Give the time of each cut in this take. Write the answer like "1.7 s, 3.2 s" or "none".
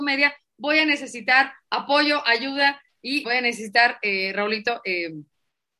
3.2 s